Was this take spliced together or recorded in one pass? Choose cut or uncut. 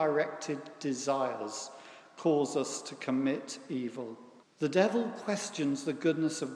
cut